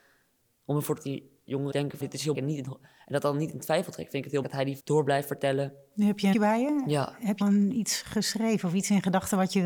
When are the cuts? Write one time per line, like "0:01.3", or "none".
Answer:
0:01.0
0:01.7
0:02.0
0:02.3
0:04.4
0:04.8
0:06.3
0:07.4